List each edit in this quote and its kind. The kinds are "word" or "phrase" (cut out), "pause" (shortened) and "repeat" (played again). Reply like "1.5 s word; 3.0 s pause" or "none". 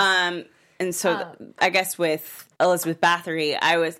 2.6 s pause